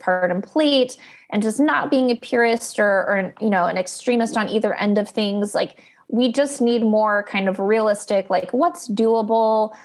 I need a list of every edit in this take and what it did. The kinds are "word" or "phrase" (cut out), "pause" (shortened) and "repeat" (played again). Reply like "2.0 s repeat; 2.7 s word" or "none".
none